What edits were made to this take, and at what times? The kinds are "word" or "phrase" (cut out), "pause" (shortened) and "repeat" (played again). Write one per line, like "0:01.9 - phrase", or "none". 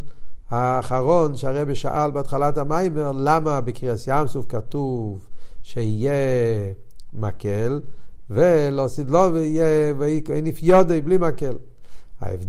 none